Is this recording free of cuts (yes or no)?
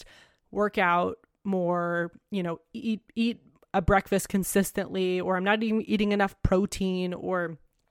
yes